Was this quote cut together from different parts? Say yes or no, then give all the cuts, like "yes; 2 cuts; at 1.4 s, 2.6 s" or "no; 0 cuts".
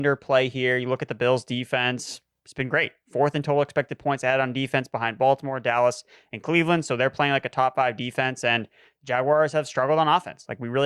no; 0 cuts